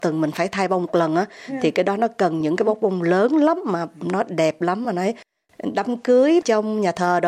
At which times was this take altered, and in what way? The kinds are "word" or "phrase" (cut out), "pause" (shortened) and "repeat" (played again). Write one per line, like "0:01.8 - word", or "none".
none